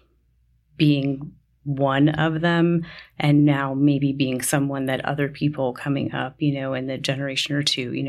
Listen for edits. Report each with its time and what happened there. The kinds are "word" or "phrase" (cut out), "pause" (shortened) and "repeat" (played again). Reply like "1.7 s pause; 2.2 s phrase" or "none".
none